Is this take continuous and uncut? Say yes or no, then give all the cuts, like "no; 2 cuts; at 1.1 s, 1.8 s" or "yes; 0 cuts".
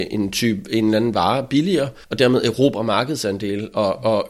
no; 1 cut; at 2.0 s